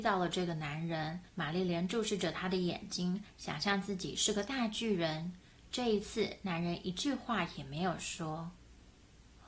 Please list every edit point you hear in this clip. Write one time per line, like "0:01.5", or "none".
0:01.3